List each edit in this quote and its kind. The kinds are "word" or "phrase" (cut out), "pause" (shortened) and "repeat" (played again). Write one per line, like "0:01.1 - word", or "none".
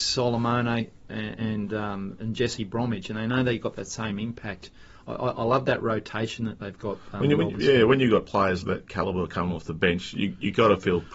0:08.6 - word